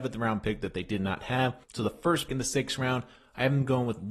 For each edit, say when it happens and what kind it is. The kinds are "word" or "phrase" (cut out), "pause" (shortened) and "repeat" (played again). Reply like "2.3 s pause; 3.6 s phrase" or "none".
1.6 s pause; 2.3 s word